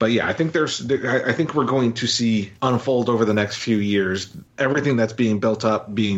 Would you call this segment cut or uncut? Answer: cut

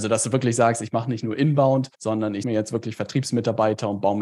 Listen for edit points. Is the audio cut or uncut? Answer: cut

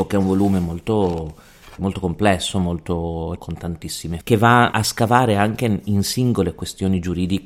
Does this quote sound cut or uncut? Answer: cut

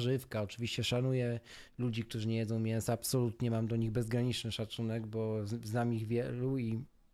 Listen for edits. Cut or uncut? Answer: uncut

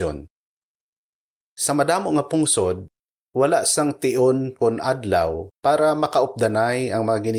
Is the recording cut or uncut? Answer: uncut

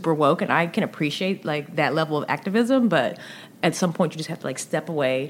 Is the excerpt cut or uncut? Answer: uncut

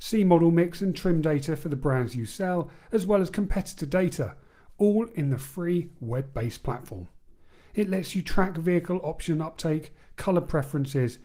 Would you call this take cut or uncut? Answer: uncut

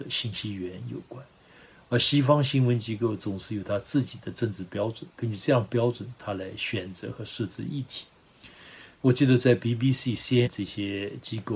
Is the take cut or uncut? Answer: cut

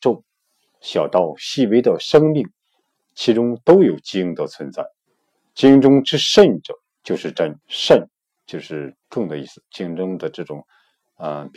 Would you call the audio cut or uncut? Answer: cut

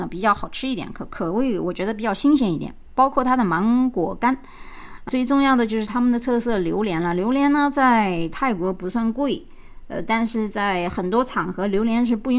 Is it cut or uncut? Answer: cut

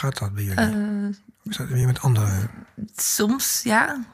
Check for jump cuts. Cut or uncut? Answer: uncut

